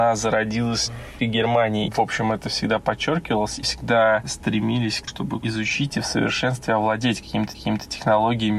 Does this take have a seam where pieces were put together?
yes; 5 cuts; at 1.2 s, 1.9 s, 3.6 s, 5.1 s, 7.5 s

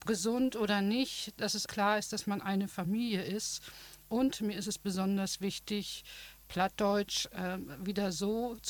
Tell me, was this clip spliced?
yes; 1 cut; at 1.7 s

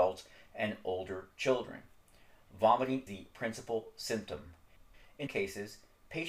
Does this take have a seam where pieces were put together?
yes; 2 cuts; at 3.1 s, 5.3 s

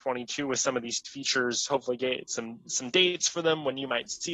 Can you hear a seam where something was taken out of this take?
no; 0 cuts

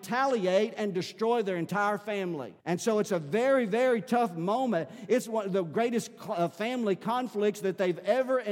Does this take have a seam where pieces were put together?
yes; 1 cut; at 2.6 s

